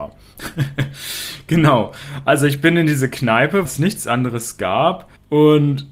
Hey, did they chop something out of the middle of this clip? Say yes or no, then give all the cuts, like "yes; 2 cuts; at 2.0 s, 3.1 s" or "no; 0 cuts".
yes; 1 cut; at 3.6 s